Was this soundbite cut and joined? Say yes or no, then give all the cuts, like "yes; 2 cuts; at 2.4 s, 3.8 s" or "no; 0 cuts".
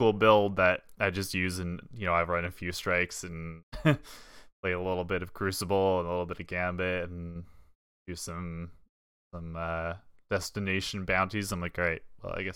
no; 0 cuts